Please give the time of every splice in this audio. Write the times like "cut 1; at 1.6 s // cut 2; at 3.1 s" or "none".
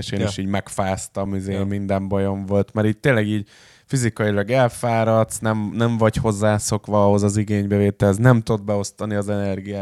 none